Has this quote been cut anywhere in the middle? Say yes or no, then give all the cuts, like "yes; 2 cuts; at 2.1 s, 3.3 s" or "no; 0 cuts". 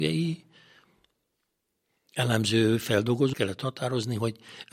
yes; 1 cut; at 3.3 s